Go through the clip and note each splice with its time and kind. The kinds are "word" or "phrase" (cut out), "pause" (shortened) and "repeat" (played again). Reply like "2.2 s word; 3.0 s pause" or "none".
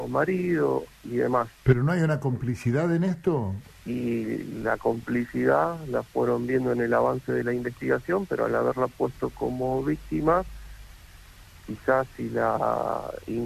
none